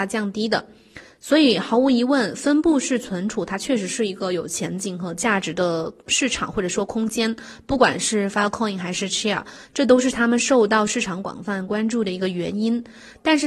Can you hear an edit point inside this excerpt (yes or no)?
no